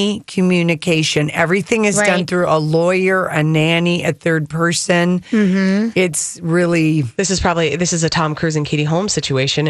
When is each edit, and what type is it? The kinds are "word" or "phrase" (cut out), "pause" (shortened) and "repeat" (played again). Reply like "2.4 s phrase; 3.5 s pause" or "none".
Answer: none